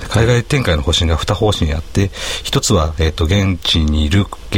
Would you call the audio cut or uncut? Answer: uncut